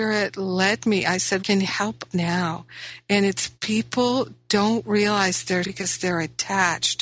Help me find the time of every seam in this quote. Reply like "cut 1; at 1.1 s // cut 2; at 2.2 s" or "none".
cut 1; at 1.4 s // cut 2; at 2.1 s // cut 3; at 3.6 s // cut 4; at 5.6 s